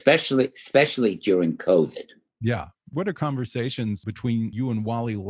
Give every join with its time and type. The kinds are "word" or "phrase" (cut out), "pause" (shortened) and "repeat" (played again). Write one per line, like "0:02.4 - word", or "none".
none